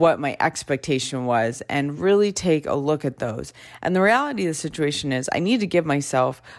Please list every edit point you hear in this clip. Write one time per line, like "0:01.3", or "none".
none